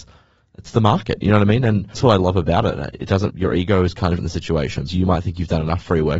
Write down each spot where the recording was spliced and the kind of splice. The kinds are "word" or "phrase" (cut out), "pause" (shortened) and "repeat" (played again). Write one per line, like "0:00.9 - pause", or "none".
0:01.9 - word
0:03.3 - word
0:04.2 - word
0:04.9 - word